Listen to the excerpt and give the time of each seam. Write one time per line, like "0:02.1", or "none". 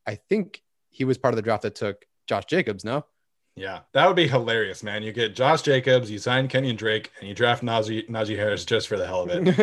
0:02.1
0:03.9